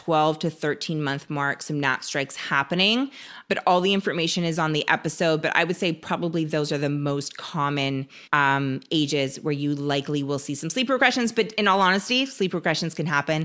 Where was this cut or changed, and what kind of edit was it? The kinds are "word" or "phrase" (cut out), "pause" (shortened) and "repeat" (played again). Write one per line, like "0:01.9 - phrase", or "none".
0:08.3 - pause